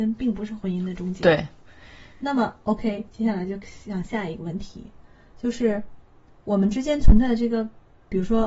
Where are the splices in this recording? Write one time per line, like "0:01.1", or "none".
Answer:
none